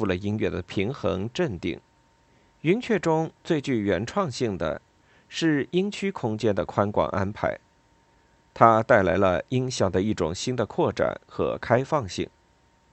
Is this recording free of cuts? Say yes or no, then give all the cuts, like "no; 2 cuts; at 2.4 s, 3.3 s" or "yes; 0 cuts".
no; 1 cut; at 2.3 s